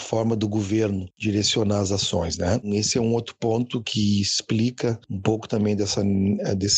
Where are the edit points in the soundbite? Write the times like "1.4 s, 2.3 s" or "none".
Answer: none